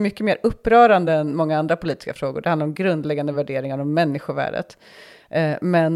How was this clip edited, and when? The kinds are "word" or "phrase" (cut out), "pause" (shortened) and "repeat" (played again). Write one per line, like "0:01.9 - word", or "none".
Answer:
none